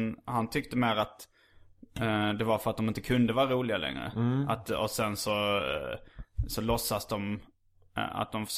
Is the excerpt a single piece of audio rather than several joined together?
yes; 0 cuts

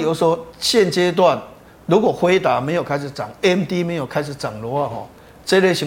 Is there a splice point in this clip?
no; 0 cuts

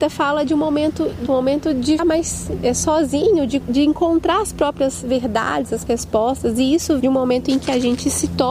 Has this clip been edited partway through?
yes; 5 cuts; at 1.3 s, 2.0 s, 3.6 s, 5.9 s, 7.0 s

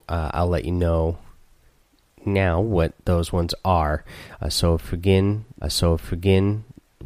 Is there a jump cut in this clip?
yes; 1 cut; at 5.6 s

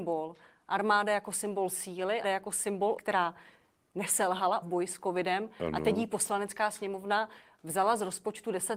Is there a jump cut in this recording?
yes; 3 cuts; at 2.2 s, 3.0 s, 4.6 s

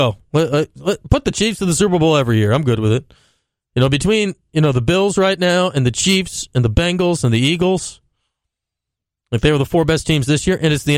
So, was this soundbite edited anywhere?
no; 0 cuts

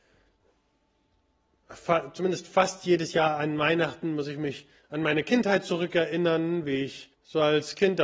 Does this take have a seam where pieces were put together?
yes; 2 cuts; at 4.8 s, 7.1 s

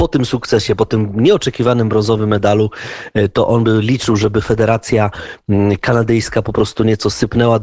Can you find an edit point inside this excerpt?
no; 0 cuts

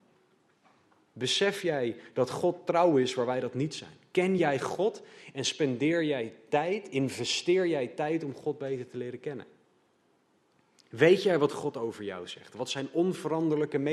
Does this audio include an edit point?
no; 0 cuts

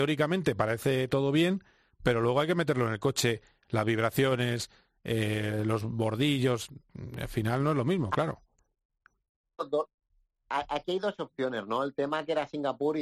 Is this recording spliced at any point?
no; 0 cuts

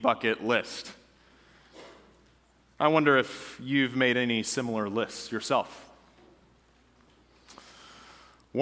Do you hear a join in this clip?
no; 0 cuts

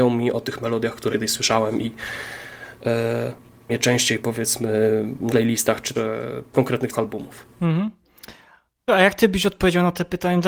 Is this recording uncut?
no; 7 cuts; at 1.1 s, 3.7 s, 5.3 s, 5.9 s, 6.5 s, 6.9 s, 8.9 s

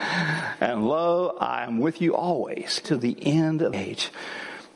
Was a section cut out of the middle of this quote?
yes; 2 cuts; at 2.8 s, 3.7 s

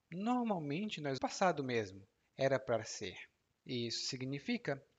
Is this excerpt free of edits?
no; 2 cuts; at 1.2 s, 2.2 s

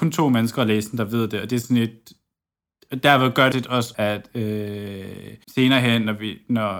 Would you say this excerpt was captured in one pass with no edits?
no; 3 cuts; at 3.5 s, 3.9 s, 5.4 s

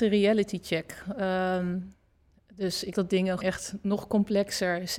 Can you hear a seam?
yes; 2 cuts; at 2.9 s, 3.4 s

